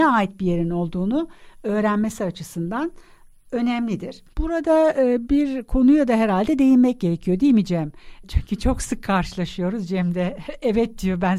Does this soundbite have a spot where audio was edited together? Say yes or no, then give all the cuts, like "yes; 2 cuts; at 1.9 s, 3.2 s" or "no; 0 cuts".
yes; 1 cut; at 4.3 s